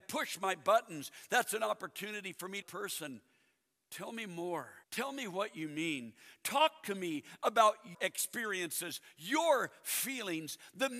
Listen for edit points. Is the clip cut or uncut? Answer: cut